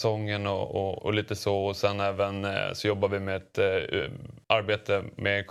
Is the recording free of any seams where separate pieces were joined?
no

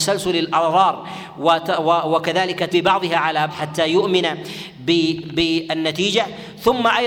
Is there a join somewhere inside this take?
yes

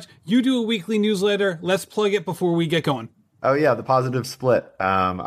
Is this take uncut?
yes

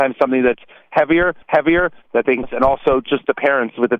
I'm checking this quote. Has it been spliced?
yes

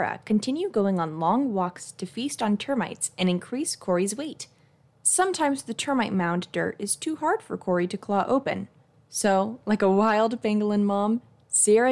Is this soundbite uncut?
yes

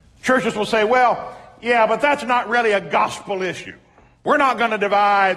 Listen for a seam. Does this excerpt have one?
no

